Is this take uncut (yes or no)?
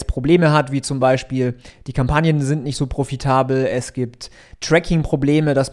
yes